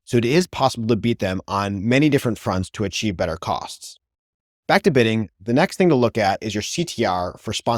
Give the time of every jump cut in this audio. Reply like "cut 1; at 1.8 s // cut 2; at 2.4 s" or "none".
none